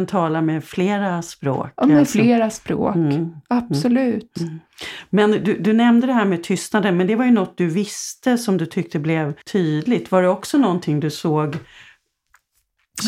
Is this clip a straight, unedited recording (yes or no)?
no